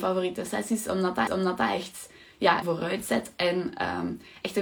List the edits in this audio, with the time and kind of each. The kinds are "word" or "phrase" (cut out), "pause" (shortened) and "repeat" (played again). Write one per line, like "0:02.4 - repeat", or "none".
0:01.3 - repeat
0:02.6 - phrase